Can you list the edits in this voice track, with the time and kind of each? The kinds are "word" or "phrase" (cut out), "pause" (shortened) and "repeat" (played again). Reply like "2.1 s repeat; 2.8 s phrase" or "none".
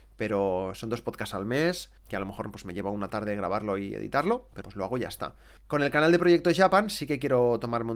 2.0 s pause; 4.6 s word; 5.6 s pause